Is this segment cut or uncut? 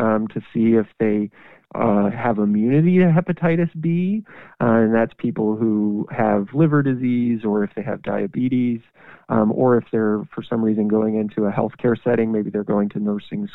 uncut